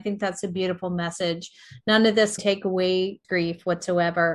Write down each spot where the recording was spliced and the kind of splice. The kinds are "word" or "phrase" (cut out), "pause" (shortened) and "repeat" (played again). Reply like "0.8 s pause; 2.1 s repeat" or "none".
2.4 s word; 3.2 s word